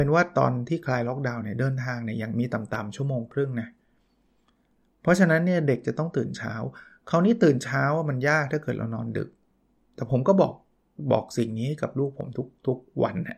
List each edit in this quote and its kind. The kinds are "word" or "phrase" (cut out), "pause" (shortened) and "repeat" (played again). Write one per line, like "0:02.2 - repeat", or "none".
none